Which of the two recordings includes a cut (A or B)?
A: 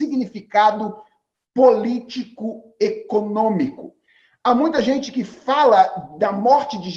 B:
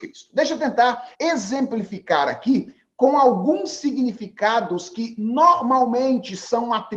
B